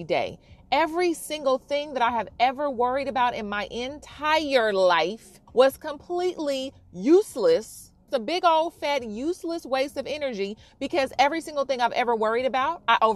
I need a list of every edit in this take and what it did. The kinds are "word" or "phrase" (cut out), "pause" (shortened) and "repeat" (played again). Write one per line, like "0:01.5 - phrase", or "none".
0:05.5 - pause
0:08.1 - word